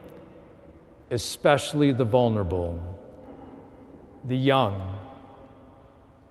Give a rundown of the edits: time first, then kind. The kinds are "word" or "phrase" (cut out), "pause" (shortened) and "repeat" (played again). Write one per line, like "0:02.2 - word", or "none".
none